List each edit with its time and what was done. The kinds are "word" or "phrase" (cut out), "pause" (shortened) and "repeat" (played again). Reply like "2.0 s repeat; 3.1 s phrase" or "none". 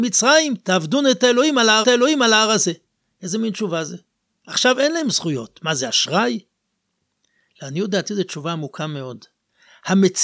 1.8 s repeat